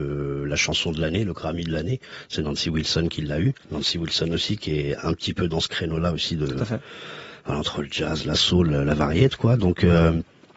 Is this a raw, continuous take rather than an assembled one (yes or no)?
no